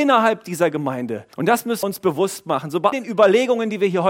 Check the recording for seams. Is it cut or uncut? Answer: cut